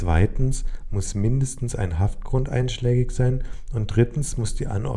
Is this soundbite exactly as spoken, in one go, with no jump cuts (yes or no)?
yes